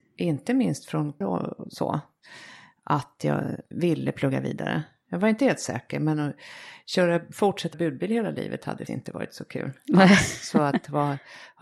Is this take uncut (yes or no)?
no